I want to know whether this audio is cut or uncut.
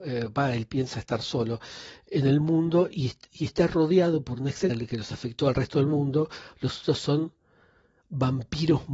cut